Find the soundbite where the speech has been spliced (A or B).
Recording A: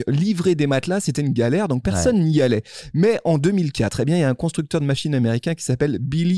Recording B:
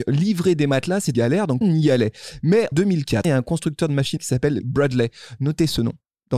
B